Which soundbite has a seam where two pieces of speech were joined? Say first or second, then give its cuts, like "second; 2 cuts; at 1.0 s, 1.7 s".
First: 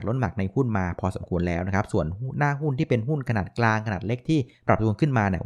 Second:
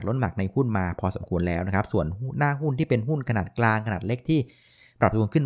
first; 1 cut; at 4.5 s